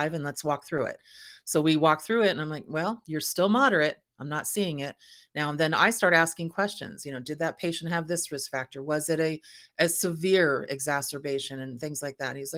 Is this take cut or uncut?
uncut